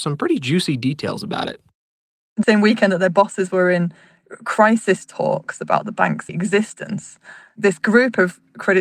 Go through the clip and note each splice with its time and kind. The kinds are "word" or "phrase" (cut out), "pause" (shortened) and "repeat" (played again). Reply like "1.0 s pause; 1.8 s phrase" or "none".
2.4 s word; 6.3 s word